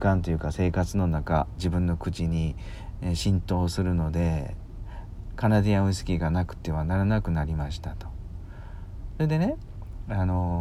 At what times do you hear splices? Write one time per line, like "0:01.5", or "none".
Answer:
0:01.6